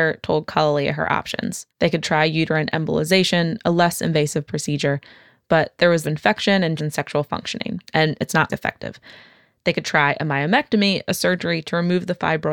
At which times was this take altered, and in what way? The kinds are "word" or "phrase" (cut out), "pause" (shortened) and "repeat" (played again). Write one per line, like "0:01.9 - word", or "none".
0:01.7 - pause
0:06.0 - phrase
0:06.8 - word
0:07.8 - pause
0:08.5 - word